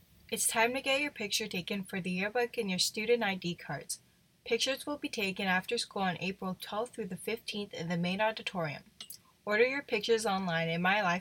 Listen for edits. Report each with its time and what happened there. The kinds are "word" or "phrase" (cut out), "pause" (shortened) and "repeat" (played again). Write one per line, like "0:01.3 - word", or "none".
none